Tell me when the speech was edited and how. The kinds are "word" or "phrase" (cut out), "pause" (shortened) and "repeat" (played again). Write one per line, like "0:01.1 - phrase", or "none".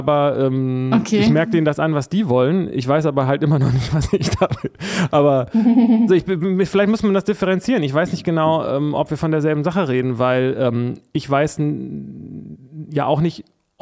0:06.1 - word